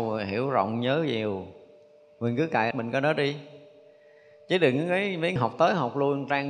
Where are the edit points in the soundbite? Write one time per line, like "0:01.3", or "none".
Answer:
0:02.7
0:05.4